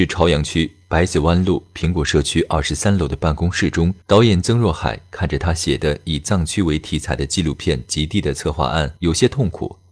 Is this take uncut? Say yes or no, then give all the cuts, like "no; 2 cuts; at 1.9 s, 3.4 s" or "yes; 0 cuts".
no; 2 cuts; at 4.0 s, 9.0 s